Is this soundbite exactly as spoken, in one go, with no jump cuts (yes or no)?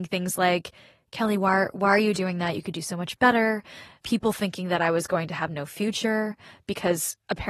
yes